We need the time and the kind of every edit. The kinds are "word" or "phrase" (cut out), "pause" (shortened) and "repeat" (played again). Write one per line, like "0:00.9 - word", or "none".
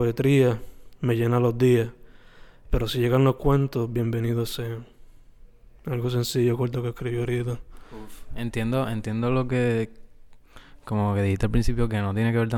none